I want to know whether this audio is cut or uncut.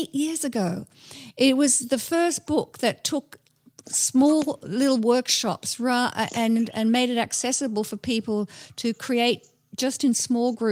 uncut